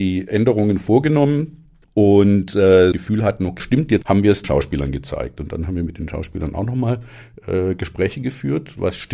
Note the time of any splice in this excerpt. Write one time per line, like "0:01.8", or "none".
0:01.8
0:02.9
0:03.6
0:04.0
0:04.4